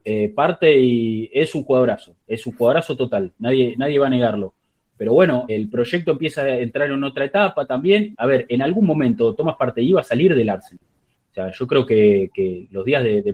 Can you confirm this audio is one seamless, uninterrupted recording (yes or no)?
no